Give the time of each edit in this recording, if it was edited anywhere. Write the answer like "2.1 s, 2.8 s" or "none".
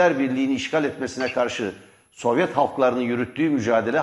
none